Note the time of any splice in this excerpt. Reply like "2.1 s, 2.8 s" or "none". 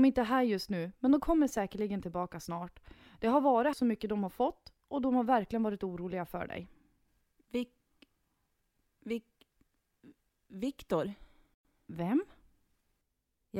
3.7 s

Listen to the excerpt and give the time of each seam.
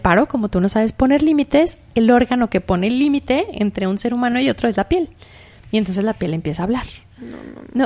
none

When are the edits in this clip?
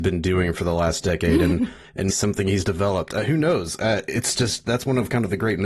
2.1 s

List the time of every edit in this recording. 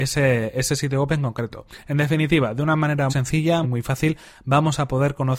3.1 s, 3.6 s

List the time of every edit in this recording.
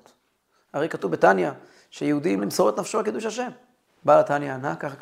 2.4 s, 3.9 s

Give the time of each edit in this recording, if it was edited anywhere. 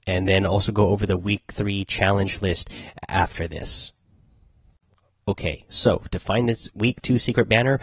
none

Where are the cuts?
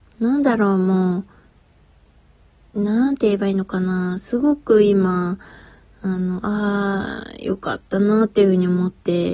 none

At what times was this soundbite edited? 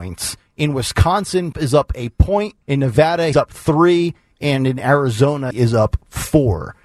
1.5 s, 2.6 s, 3.3 s, 5.5 s

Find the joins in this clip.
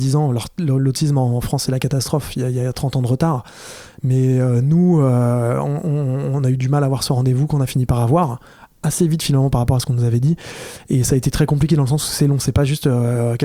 none

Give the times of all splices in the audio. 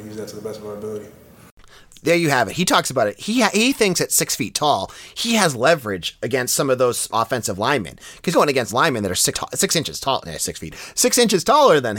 7.1 s, 8.3 s, 8.7 s, 9.3 s

